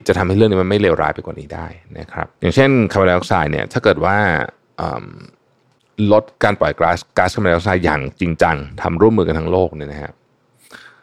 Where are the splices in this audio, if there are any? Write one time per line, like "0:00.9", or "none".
0:02.3